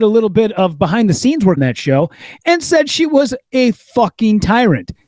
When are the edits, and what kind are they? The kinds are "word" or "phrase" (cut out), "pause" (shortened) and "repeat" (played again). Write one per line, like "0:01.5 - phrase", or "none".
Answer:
0:01.6 - word